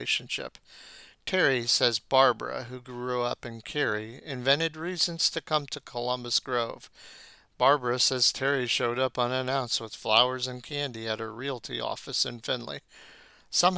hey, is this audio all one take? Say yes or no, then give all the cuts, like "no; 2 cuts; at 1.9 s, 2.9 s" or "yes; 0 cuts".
yes; 0 cuts